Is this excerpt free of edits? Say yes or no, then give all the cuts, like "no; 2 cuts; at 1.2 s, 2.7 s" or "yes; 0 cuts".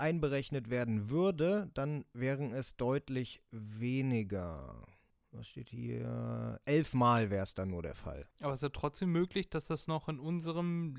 no; 2 cuts; at 5.1 s, 8.3 s